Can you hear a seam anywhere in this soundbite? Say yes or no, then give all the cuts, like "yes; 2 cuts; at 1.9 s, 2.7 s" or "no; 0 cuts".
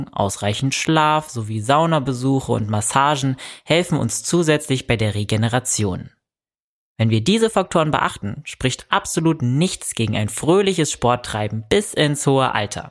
no; 0 cuts